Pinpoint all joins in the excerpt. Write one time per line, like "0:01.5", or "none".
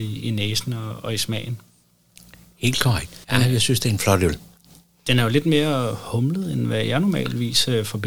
0:03.2